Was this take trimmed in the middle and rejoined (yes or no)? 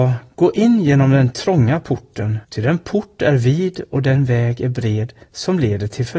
yes